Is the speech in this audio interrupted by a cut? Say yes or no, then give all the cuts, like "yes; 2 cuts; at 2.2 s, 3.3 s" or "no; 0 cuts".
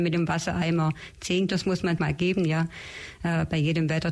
yes; 2 cuts; at 1.5 s, 2.0 s